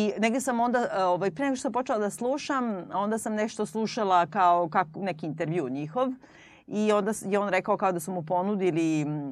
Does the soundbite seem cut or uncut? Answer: uncut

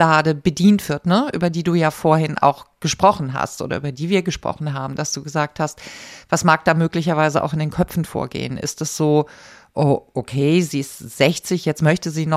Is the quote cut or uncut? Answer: uncut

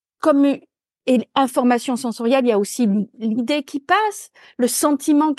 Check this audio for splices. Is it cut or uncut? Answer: uncut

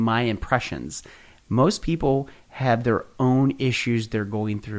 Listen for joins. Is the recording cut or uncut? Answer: uncut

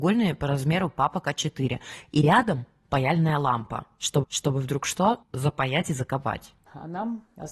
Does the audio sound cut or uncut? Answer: cut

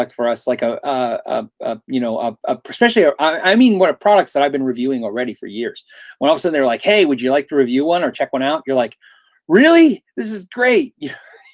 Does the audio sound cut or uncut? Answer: uncut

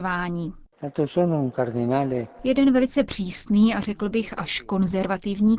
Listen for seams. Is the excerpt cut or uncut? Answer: uncut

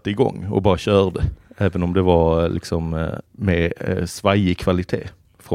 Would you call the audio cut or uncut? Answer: cut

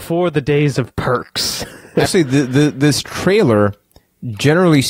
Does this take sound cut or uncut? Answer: cut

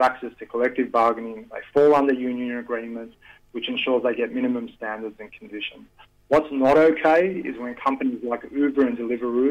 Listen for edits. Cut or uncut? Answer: uncut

